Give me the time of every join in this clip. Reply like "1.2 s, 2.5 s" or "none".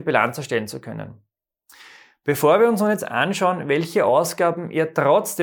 none